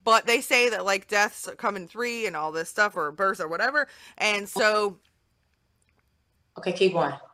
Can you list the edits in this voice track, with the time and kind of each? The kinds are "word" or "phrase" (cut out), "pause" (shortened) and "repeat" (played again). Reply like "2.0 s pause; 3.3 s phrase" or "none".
none